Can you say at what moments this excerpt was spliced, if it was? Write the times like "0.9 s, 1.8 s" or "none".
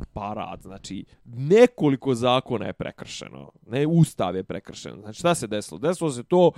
1.1 s